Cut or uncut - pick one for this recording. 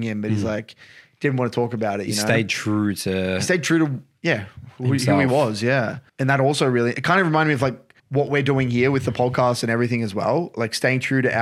cut